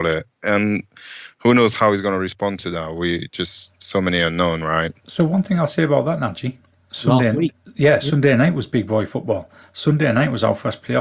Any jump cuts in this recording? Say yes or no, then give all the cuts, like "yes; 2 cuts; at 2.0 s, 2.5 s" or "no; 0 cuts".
no; 0 cuts